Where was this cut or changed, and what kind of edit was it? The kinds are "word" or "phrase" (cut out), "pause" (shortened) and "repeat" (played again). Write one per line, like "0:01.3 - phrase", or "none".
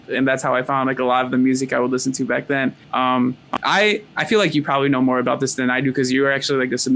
0:02.8 - pause